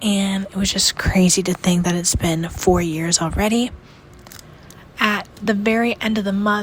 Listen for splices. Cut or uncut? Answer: uncut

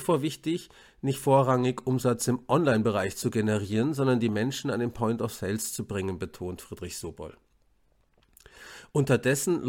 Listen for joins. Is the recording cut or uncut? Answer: uncut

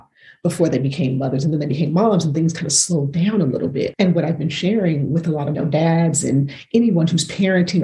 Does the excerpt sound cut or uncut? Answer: cut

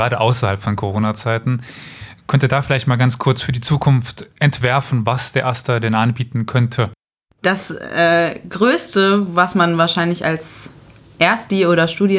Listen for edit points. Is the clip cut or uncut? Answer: uncut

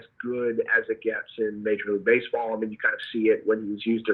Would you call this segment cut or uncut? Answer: uncut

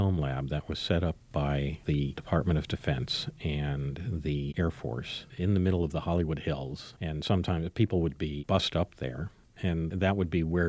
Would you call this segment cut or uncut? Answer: uncut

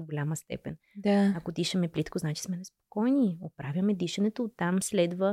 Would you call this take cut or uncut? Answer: uncut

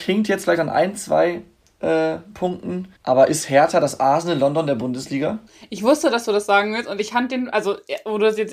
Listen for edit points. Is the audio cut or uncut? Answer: cut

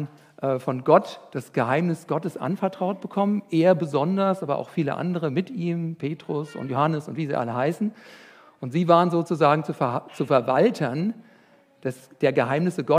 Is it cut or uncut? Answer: uncut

